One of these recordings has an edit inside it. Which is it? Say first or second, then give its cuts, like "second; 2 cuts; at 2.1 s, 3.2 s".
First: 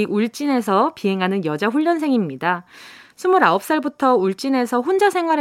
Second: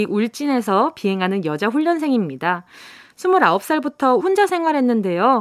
second; 1 cut; at 4.2 s